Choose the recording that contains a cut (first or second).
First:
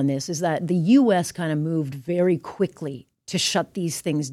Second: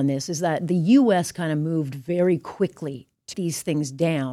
second